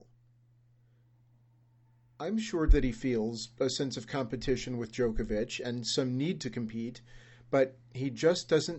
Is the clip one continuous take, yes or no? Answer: yes